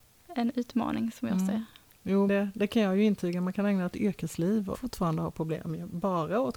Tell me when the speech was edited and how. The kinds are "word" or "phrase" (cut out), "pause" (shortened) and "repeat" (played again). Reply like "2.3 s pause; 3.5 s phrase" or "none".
2.3 s word; 3.9 s word; 4.7 s word